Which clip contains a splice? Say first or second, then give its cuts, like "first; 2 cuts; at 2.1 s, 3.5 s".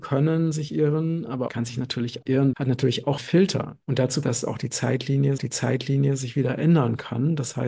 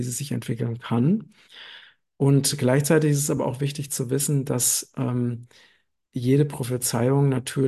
first; 7 cuts; at 1.5 s, 2.2 s, 2.5 s, 3.2 s, 3.8 s, 4.2 s, 5.4 s